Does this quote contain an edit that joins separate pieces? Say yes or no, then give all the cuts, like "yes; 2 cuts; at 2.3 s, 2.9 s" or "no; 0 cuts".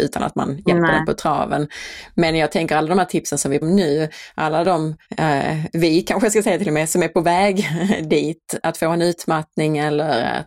yes; 3 cuts; at 3.6 s, 5.1 s, 8.6 s